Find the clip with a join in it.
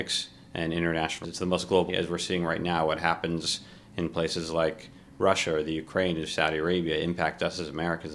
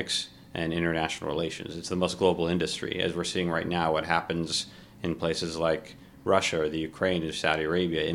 first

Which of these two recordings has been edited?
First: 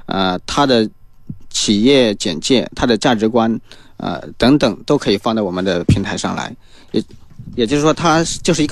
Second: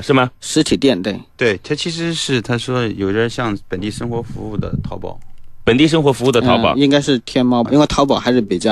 second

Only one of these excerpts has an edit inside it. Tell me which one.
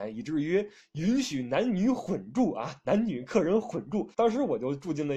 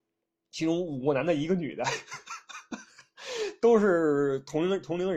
first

